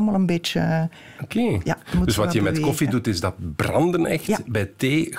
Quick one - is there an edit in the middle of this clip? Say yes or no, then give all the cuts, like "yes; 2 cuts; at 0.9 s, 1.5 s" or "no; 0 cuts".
no; 0 cuts